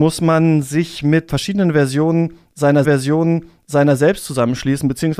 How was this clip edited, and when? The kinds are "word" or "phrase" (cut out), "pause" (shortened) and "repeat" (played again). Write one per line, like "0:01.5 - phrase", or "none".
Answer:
0:01.3 - word
0:02.8 - repeat

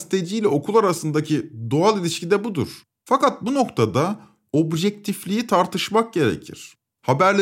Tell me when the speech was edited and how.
none

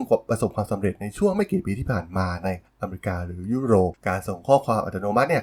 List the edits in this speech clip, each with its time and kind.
0:04.0 - pause

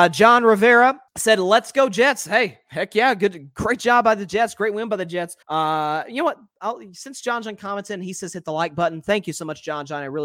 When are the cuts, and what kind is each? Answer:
0:01.1 - pause
0:05.4 - pause

